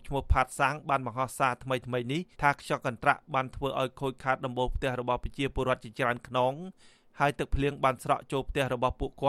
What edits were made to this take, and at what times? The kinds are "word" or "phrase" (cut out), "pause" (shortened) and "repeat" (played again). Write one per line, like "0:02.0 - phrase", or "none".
0:02.3 - pause